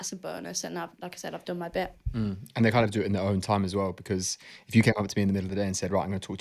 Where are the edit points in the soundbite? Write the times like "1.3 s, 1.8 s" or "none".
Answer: none